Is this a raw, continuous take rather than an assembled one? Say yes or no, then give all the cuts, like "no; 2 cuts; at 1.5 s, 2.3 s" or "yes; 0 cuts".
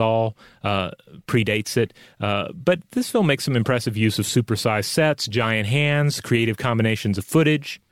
yes; 0 cuts